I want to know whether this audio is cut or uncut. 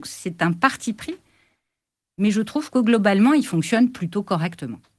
uncut